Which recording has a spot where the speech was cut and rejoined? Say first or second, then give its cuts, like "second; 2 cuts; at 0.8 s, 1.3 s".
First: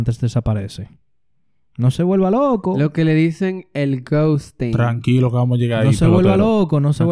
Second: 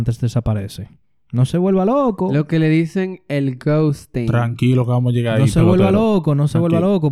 second; 1 cut; at 1.0 s